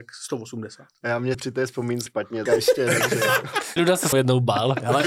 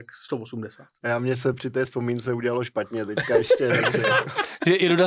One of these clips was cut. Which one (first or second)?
first